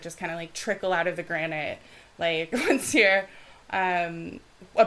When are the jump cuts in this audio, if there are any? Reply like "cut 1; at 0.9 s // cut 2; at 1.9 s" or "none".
none

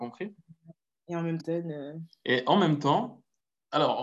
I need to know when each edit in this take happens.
cut 1; at 1.4 s

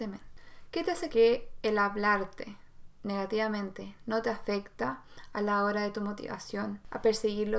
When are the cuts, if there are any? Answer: cut 1; at 1.1 s

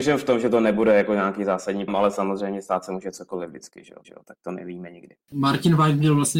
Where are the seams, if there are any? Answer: cut 1; at 1.9 s // cut 2; at 4.0 s // cut 3; at 5.2 s

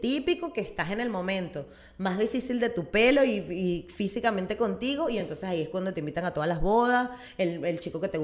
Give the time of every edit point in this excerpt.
none

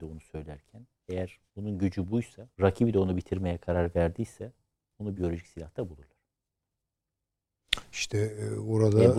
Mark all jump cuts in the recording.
cut 1; at 1.5 s // cut 2; at 2.5 s // cut 3; at 5.2 s

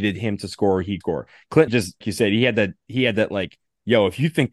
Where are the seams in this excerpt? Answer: cut 1; at 1.0 s // cut 2; at 1.7 s // cut 3; at 2.0 s

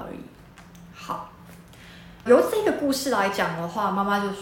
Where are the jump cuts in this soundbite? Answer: cut 1; at 2.3 s

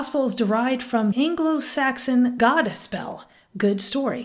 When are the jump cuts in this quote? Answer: cut 1; at 1.1 s // cut 2; at 2.4 s

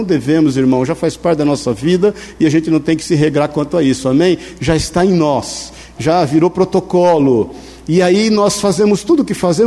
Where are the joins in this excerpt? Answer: cut 1; at 6.0 s

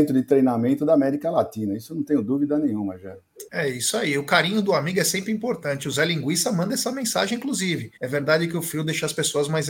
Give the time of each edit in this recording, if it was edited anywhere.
cut 1; at 3.5 s // cut 2; at 8.0 s

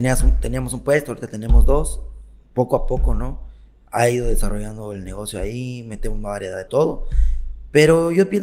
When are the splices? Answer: cut 1; at 6.7 s

